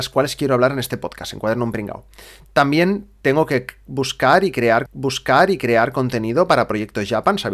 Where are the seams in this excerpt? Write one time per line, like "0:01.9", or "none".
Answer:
0:04.9

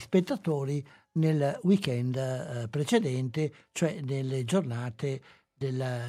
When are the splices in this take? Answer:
none

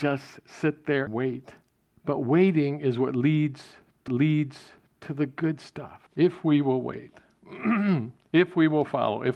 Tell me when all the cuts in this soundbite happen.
0:01.1
0:01.8
0:04.1
0:06.1

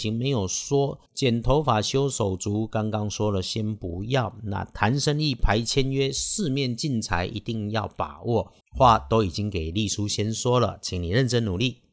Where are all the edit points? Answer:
0:01.1
0:08.6

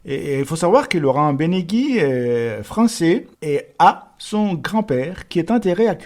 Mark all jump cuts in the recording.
0:03.3

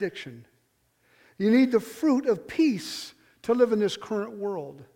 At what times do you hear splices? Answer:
none

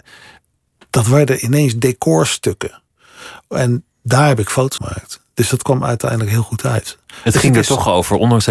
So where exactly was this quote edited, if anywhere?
0:03.9
0:04.8

